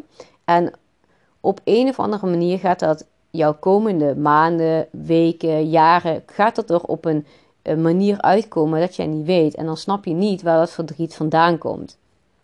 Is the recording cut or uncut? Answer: uncut